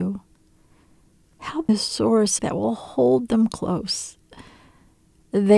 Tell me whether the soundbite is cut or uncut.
cut